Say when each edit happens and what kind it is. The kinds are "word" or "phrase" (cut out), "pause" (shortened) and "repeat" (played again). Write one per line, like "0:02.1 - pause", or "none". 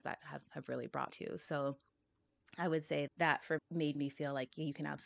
0:01.1 - word
0:03.1 - word
0:03.6 - word